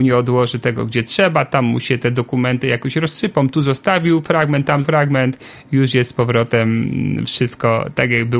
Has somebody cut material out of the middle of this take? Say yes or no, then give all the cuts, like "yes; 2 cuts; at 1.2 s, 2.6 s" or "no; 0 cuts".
yes; 1 cut; at 4.8 s